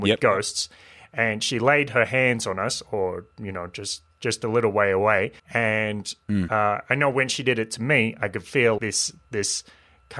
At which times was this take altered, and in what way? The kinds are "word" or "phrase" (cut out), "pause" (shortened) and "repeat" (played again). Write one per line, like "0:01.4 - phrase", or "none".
0:05.4 - pause
0:08.8 - word